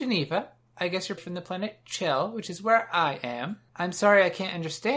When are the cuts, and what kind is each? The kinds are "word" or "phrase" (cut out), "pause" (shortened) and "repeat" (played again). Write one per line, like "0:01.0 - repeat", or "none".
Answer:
0:01.2 - word
0:03.7 - pause